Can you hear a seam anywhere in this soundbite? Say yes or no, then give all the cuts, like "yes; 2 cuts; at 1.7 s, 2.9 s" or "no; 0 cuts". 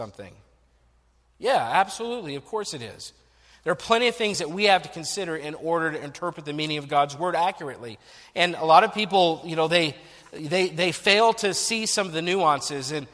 no; 0 cuts